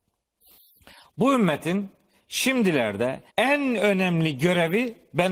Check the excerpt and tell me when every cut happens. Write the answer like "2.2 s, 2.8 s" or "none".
3.3 s